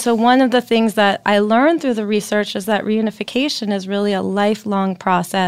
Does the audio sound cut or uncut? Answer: uncut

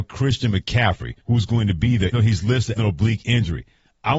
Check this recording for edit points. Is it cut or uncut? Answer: cut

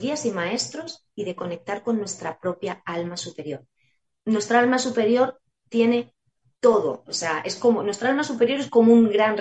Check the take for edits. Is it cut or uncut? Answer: uncut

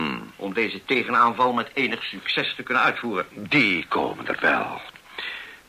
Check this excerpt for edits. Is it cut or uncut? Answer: uncut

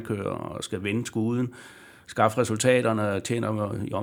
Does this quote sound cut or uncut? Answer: uncut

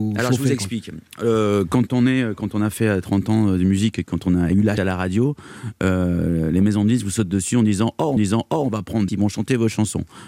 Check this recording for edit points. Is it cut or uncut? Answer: cut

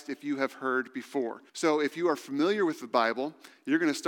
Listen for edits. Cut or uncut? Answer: cut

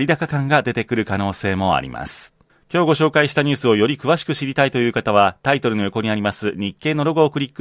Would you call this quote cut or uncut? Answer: cut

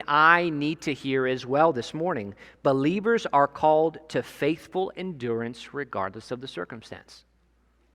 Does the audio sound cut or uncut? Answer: uncut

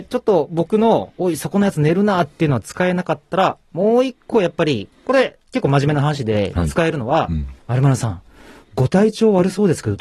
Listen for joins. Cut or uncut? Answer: cut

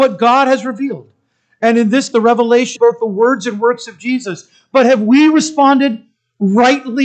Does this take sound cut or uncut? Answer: cut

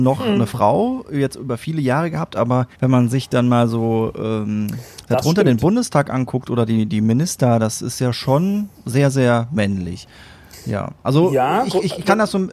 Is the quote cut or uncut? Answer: cut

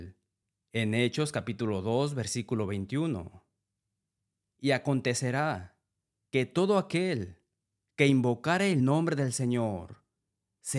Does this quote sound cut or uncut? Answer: uncut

